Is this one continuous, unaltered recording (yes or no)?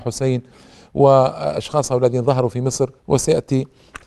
no